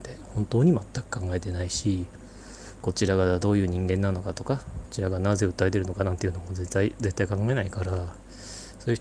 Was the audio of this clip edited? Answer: yes; 1 cut; at 2.8 s

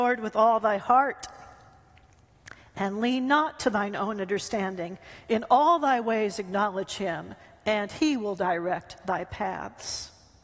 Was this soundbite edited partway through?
no; 0 cuts

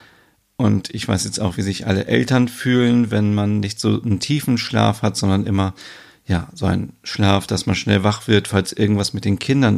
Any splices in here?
no; 0 cuts

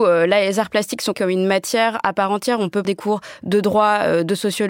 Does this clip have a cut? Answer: yes; 2 cuts; at 1.1 s, 2.8 s

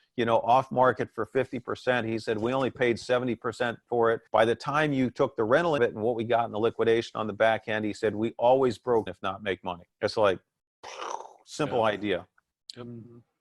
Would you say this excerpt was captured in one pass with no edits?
no; 4 cuts; at 4.3 s, 5.8 s, 9.1 s, 9.9 s

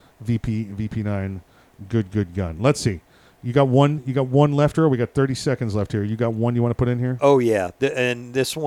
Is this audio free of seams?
yes; 0 cuts

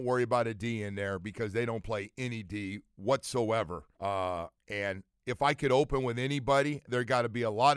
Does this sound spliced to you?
yes; 1 cut; at 3.9 s

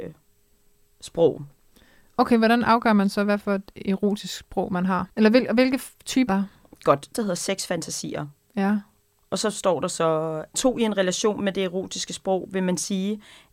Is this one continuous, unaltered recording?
no; 4 cuts; at 5.1 s, 6.3 s, 7.1 s, 10.5 s

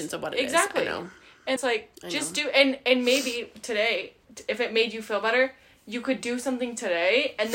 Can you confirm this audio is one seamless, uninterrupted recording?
no; 2 cuts; at 1.6 s, 2.0 s

